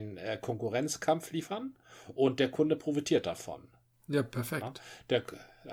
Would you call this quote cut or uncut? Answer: uncut